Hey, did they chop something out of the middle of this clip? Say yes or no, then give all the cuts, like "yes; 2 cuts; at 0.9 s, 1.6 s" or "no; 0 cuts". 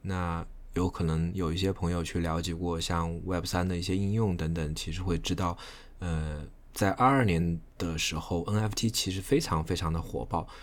no; 0 cuts